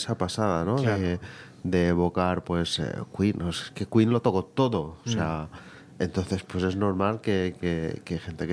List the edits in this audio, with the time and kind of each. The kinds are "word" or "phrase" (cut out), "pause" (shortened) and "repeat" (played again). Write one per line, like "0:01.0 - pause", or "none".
none